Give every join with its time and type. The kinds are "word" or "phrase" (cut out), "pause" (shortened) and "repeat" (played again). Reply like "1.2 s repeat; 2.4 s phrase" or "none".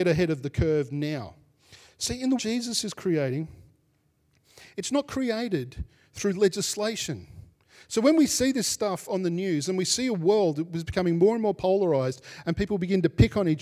2.4 s word